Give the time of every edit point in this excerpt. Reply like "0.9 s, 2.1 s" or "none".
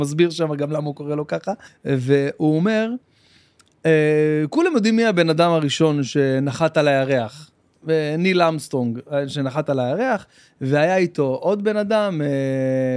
1.7 s